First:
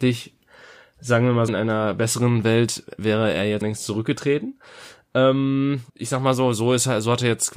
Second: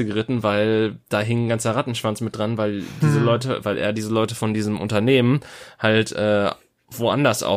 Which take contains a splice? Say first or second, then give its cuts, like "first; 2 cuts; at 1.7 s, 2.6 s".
first; 3 cuts; at 1.5 s, 3.6 s, 5.9 s